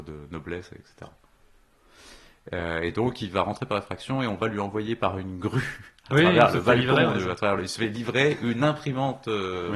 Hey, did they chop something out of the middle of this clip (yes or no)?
no